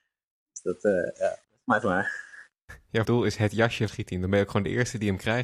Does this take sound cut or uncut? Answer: cut